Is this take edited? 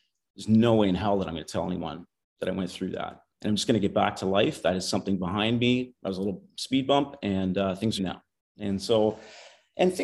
yes; 2 cuts; at 3.3 s, 8.0 s

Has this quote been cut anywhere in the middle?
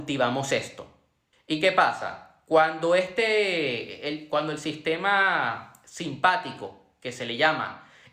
yes; 1 cut; at 1.3 s

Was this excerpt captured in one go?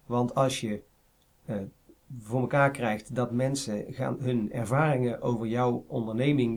yes; 0 cuts

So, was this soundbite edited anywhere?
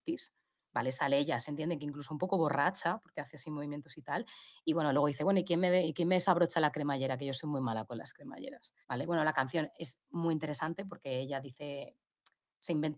yes; 1 cut; at 8.8 s

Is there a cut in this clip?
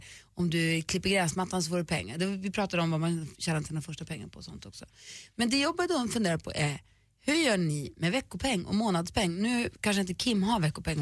no; 0 cuts

